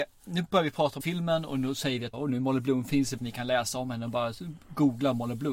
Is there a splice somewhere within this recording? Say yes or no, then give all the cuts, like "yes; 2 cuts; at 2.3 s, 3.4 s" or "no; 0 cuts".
yes; 3 cuts; at 1.0 s, 2.1 s, 3.2 s